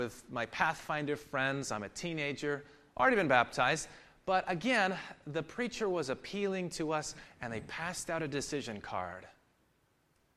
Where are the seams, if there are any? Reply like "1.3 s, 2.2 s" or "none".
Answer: none